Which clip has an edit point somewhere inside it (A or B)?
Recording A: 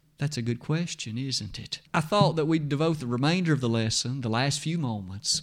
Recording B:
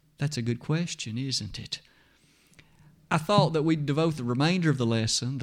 A